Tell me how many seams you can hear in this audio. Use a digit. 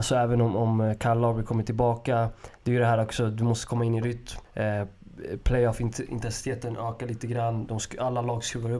1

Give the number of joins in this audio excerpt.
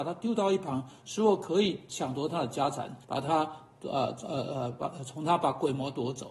1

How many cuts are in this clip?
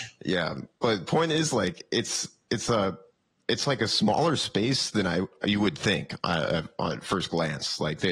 0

